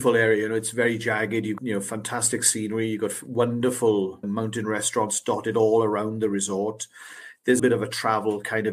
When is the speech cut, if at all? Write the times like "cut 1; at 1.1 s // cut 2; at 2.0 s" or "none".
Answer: cut 1; at 1.6 s // cut 2; at 4.2 s // cut 3; at 7.6 s